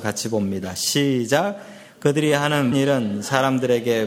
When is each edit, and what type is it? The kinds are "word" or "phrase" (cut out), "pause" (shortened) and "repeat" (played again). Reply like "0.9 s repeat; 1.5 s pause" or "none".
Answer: 2.7 s word